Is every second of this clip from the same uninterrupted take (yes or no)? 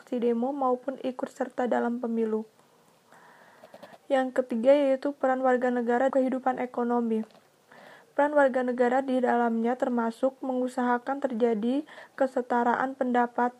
no